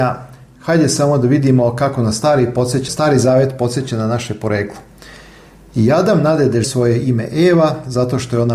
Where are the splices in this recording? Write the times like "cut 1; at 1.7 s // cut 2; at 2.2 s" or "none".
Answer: cut 1; at 2.9 s // cut 2; at 6.6 s